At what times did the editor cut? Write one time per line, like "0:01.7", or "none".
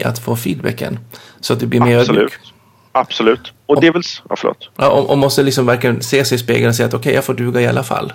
0:03.8